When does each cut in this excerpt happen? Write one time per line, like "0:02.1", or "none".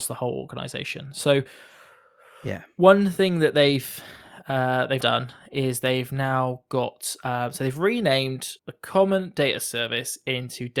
0:05.0
0:08.6